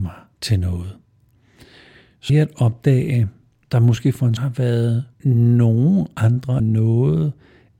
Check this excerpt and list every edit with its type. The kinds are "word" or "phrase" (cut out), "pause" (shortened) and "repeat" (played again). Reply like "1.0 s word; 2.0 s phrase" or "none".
2.3 s word; 3.6 s word; 4.4 s word; 5.1 s pause; 6.6 s word